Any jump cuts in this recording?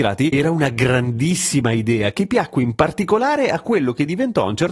no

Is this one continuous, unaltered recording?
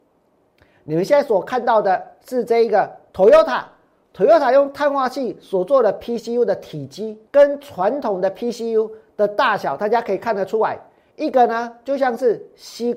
no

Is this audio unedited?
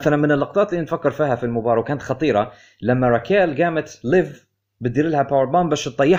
yes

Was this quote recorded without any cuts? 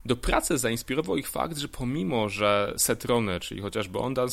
yes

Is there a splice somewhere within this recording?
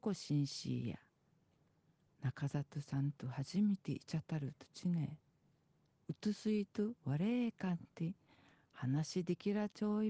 yes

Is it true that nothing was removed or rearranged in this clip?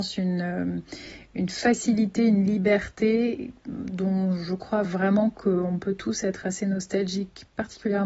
yes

